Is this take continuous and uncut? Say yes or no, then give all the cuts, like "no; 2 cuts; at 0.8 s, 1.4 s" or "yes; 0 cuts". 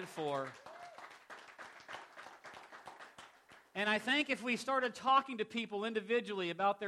yes; 0 cuts